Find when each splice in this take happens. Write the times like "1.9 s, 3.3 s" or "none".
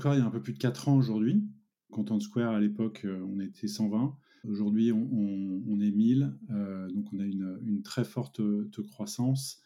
none

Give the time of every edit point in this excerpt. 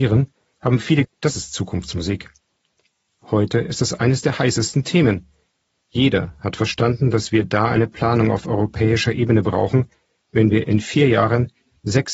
1.0 s

